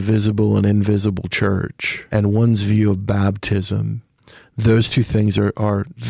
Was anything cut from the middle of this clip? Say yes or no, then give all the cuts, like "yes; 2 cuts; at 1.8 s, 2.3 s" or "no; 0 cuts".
no; 0 cuts